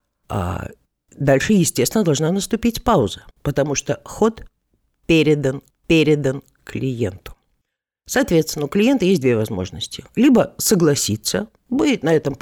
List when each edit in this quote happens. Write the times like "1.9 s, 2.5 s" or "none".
3.3 s, 5.7 s

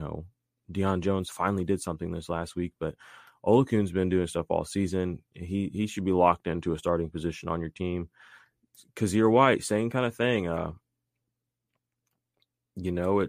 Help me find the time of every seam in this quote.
none

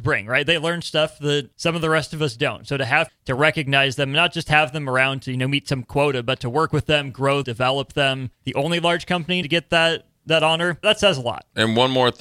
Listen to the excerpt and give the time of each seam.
1.5 s, 3.1 s, 7.4 s, 8.3 s, 9.4 s, 10.8 s

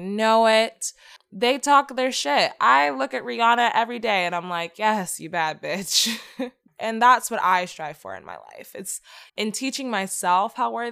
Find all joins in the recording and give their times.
9.3 s

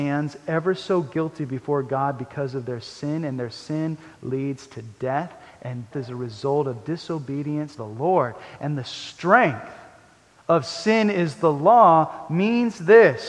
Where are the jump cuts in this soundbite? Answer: 5.9 s, 7.8 s

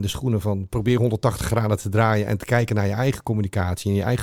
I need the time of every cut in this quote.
none

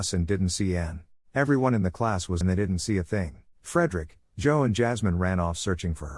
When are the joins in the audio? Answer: 1.2 s, 2.4 s, 3.5 s

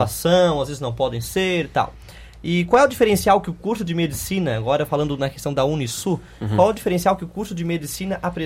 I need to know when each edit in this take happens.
none

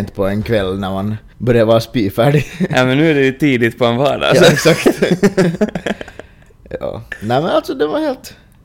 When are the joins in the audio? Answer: 1.3 s

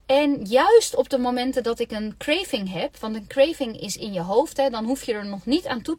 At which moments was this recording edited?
none

